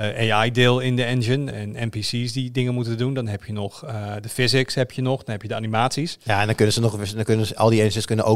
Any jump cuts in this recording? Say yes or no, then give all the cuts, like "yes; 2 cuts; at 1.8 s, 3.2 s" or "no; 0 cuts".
yes; 1 cut; at 1.5 s